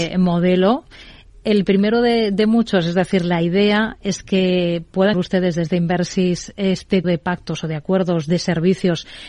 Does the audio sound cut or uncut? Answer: cut